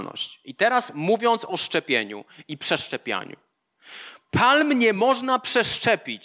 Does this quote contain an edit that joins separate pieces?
no; 0 cuts

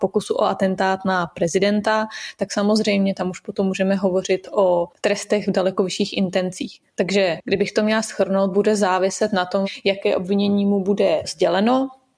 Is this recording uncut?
no; 1 cut; at 4.9 s

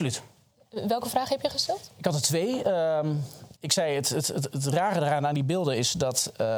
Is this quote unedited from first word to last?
no; 1 cut; at 3.6 s

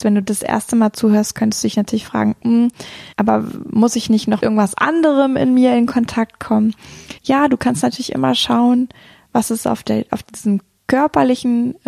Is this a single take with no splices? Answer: no; 3 cuts; at 3.1 s, 4.4 s, 7.2 s

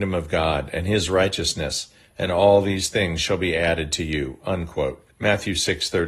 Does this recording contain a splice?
yes; 1 cut; at 5.1 s

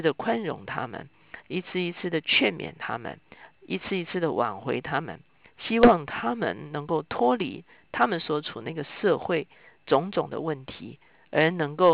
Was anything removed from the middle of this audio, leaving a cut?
no; 0 cuts

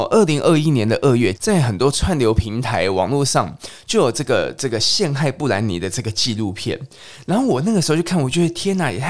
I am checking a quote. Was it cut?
yes; 1 cut; at 1.3 s

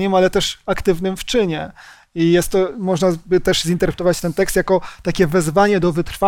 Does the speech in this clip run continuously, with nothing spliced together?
yes; 0 cuts

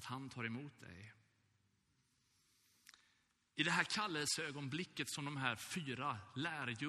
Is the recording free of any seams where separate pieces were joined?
yes; 0 cuts

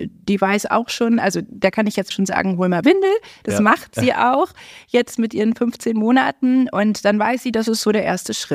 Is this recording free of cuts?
no; 2 cuts; at 2.1 s, 2.8 s

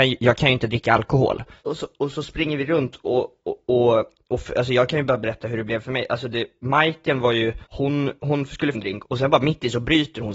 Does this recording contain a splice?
yes; 2 cuts; at 7.7 s, 8.7 s

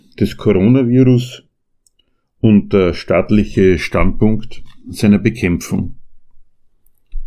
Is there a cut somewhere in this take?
no; 0 cuts

